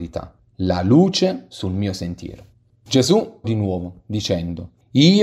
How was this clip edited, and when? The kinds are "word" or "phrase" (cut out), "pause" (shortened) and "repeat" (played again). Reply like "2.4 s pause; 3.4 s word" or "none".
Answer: 3.4 s word